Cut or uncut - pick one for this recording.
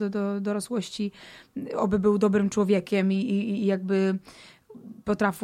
uncut